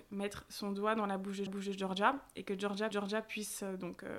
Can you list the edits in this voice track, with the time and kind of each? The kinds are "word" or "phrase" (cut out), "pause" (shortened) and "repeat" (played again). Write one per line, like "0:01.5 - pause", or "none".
0:01.5 - repeat
0:02.9 - repeat